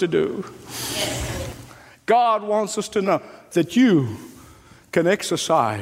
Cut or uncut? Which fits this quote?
uncut